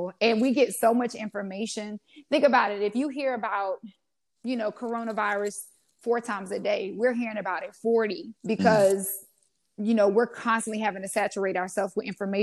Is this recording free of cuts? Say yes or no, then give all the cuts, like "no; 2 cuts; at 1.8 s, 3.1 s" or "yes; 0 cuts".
no; 1 cut; at 8.4 s